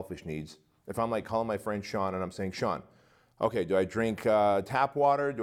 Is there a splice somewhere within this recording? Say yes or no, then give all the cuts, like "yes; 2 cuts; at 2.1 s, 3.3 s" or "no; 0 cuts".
no; 0 cuts